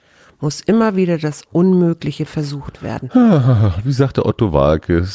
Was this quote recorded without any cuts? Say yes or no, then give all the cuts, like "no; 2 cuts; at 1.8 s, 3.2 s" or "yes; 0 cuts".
yes; 0 cuts